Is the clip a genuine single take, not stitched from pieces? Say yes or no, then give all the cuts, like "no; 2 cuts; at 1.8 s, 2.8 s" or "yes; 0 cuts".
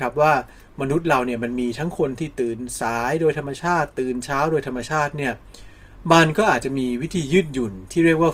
yes; 0 cuts